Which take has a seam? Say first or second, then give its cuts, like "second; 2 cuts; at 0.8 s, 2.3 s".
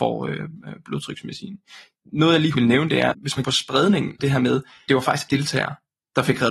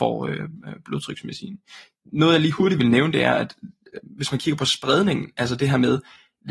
first; 6 cuts; at 2.5 s, 3.1 s, 3.4 s, 4.2 s, 4.9 s, 5.3 s